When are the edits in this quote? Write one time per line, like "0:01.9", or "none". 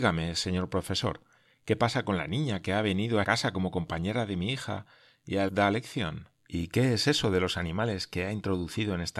0:03.2
0:05.5
0:06.4